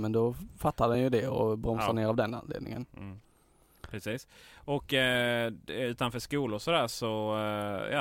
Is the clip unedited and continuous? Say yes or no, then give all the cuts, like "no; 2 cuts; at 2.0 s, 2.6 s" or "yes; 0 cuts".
yes; 0 cuts